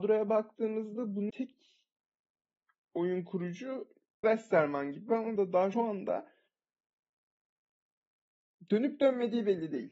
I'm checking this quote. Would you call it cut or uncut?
cut